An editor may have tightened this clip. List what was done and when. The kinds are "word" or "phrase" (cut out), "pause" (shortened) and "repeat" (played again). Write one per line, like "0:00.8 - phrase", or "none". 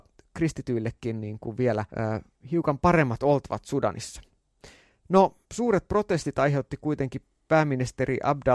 0:01.9 - pause
0:05.4 - pause